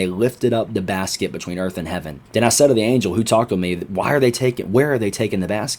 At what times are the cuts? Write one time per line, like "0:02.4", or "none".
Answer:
0:02.3